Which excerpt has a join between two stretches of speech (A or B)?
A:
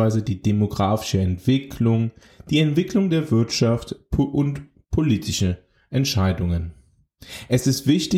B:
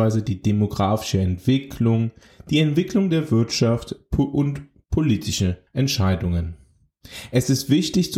B